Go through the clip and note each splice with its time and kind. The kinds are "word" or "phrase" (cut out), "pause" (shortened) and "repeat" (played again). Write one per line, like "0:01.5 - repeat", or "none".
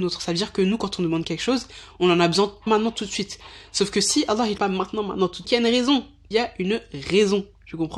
0:02.7 - word
0:04.6 - phrase
0:05.4 - phrase
0:06.3 - phrase